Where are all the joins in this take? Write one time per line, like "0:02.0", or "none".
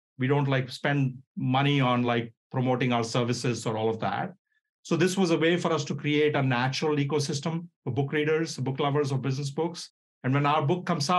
none